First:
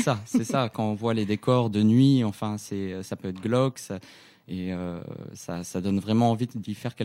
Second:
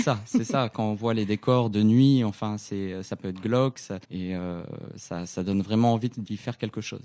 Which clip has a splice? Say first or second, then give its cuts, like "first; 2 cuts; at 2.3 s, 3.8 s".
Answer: second; 1 cut; at 4.0 s